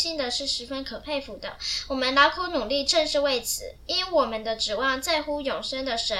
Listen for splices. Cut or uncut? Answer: cut